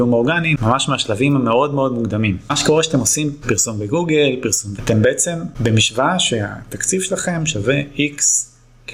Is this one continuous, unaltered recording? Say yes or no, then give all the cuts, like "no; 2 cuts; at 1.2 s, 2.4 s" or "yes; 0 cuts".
no; 2 cuts; at 3.4 s, 4.8 s